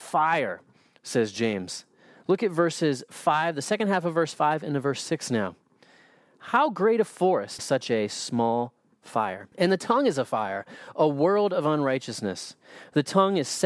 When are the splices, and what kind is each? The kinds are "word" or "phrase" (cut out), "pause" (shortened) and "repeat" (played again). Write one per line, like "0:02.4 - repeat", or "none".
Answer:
0:07.6 - phrase
0:09.5 - pause